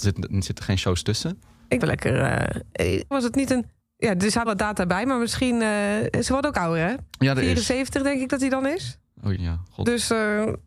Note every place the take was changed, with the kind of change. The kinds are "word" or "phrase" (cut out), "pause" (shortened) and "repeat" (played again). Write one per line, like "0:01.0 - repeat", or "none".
0:01.8 - phrase
0:03.1 - word
0:03.8 - pause
0:04.5 - phrase
0:07.1 - pause
0:09.4 - word